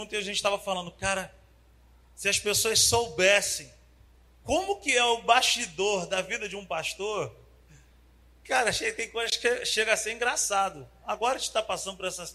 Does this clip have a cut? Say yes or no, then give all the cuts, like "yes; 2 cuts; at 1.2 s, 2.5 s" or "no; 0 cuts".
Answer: no; 0 cuts